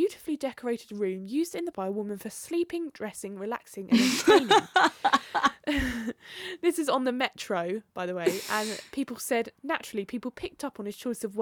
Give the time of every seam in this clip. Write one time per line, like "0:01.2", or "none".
0:01.7